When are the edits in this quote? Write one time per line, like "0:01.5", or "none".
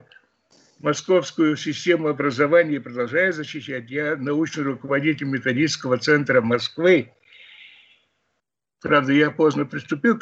none